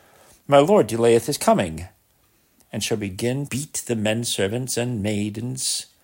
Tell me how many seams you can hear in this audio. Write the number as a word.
one